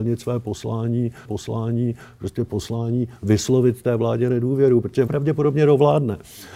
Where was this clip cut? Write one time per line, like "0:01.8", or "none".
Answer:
0:01.2
0:05.1